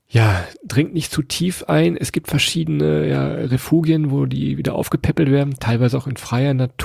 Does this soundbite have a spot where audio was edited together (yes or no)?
no